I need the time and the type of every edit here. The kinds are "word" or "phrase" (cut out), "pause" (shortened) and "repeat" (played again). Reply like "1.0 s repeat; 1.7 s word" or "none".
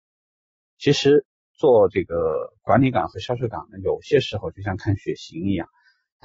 2.6 s pause